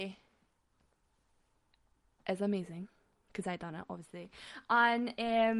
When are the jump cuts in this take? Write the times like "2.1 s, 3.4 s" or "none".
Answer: none